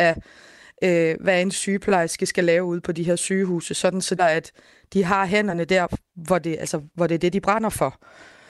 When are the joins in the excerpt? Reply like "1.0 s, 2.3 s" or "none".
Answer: 4.2 s